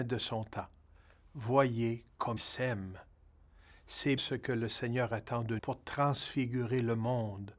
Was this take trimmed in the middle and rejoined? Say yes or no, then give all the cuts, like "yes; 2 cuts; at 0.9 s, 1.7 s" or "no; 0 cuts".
yes; 3 cuts; at 2.4 s, 4.2 s, 5.6 s